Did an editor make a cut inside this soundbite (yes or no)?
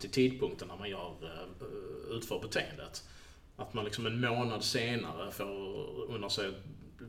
no